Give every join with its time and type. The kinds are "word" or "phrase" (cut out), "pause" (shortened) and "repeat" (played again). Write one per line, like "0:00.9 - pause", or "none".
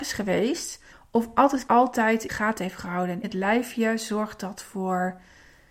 0:00.9 - pause
0:01.7 - phrase
0:02.3 - phrase
0:03.2 - word

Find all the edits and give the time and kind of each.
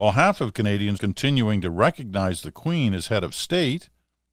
0:01.0 - word

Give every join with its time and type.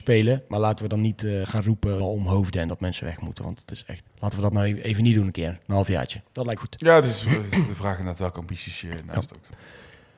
0:01.4 - word
0:02.0 - word
0:04.1 - pause
0:06.6 - word

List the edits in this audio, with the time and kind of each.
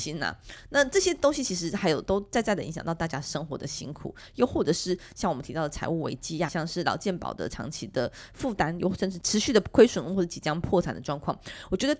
0:06.5 - word

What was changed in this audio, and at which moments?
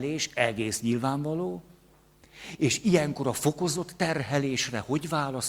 none

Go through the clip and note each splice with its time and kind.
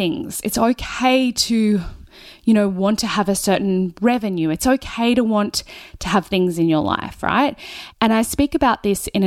none

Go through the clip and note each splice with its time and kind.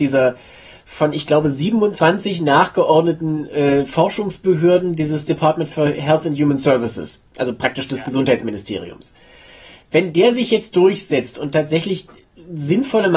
none

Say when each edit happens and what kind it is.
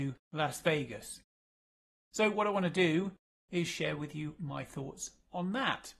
none

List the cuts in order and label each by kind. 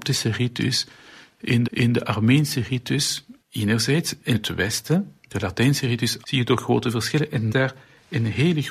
0:01.6 - repeat
0:03.4 - pause
0:04.3 - word
0:05.2 - pause
0:06.2 - word
0:07.5 - phrase

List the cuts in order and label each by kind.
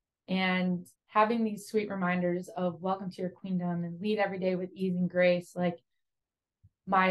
0:01.0 - pause

